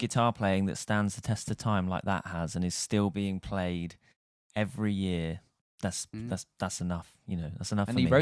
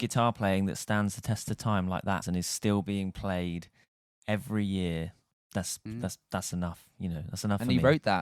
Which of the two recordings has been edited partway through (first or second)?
second